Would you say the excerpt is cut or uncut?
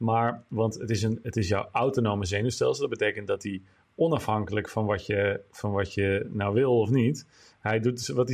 uncut